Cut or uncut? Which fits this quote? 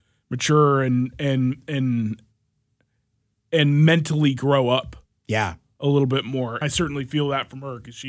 cut